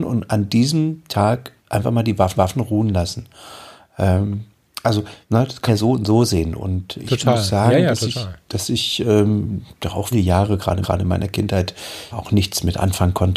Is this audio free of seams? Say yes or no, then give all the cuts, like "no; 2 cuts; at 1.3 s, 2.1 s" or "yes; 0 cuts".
no; 8 cuts; at 1.6 s, 2.4 s, 5.2 s, 5.7 s, 7.0 s, 10.1 s, 10.8 s, 12.1 s